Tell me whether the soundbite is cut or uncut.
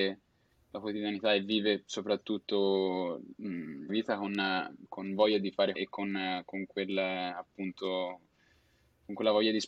cut